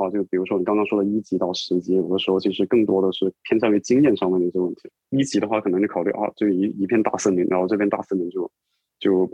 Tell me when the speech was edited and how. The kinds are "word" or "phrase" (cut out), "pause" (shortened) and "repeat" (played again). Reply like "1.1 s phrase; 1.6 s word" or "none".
5.0 s pause

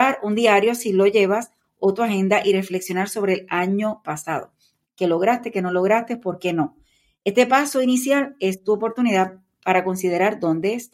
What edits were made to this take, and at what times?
none

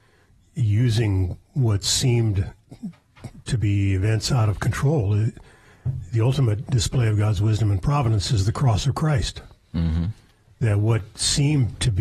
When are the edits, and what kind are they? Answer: none

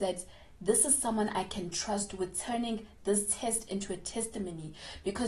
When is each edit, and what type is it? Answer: none

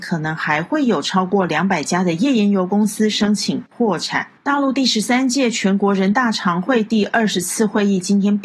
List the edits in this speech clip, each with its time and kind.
4.4 s pause

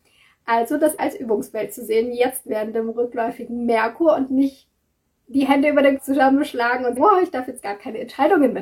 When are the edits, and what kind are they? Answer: 1.0 s word; 6.0 s word; 7.0 s word

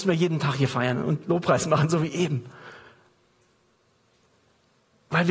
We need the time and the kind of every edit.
none

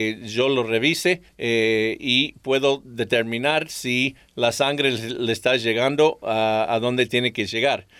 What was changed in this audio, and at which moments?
1.3 s pause

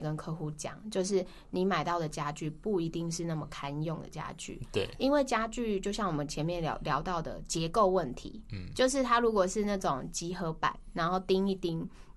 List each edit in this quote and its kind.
none

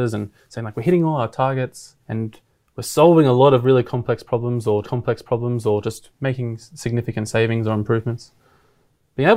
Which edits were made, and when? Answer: 2.0 s pause; 4.8 s repeat

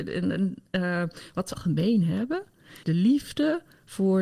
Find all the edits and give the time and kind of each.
1.5 s word; 2.8 s word

